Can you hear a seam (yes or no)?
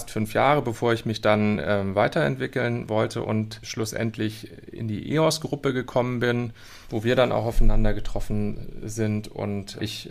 no